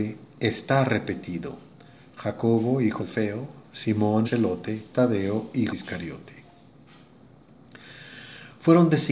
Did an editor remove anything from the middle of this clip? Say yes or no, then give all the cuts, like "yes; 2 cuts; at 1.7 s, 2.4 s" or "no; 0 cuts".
yes; 4 cuts; at 3.0 s, 4.2 s, 4.9 s, 5.7 s